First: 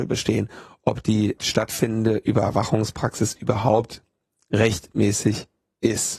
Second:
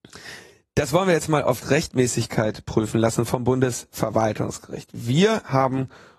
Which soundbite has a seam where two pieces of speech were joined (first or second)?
first